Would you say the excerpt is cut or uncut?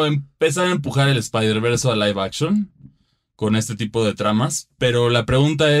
uncut